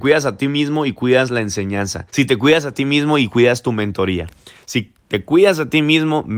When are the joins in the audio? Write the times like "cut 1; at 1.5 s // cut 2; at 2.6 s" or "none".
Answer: cut 1; at 2.1 s